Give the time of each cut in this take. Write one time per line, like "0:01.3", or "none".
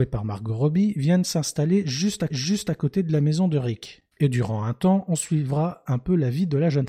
0:02.3